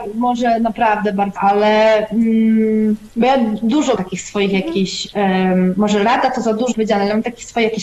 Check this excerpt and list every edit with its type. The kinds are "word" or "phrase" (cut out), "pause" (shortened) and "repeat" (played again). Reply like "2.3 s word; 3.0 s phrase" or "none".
1.4 s word; 3.1 s pause; 4.0 s word; 6.7 s word